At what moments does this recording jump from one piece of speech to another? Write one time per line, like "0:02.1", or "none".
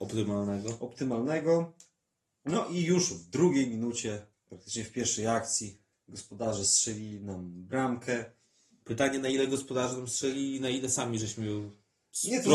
none